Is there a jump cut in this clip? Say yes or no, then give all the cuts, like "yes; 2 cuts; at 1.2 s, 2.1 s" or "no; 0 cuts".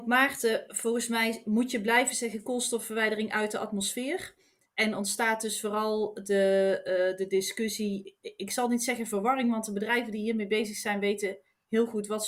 no; 0 cuts